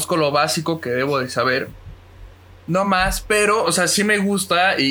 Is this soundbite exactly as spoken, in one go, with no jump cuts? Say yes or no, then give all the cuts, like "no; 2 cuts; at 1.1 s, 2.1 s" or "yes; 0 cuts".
yes; 0 cuts